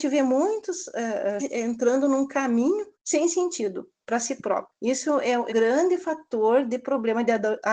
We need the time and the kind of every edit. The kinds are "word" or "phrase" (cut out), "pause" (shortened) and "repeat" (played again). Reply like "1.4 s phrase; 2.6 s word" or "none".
1.4 s word; 2.9 s pause; 4.7 s pause; 5.5 s word